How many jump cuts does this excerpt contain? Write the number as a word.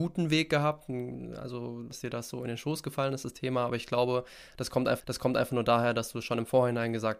one